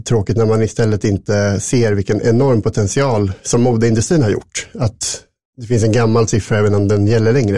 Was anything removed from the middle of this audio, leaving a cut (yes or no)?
no